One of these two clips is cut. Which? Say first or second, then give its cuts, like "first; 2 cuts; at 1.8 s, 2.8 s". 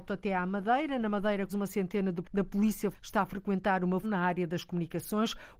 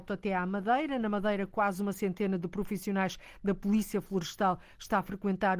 first; 4 cuts; at 1.5 s, 2.2 s, 2.9 s, 4.0 s